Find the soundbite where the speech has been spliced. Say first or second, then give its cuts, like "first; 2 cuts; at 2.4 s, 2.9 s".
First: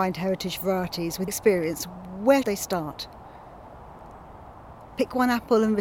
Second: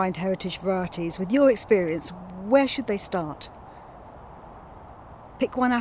first; 2 cuts; at 1.3 s, 2.4 s